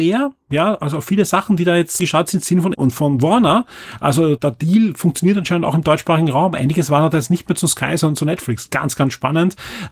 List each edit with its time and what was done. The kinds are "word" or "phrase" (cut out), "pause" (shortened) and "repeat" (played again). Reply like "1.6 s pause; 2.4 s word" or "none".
2.0 s phrase; 2.7 s word; 4.4 s word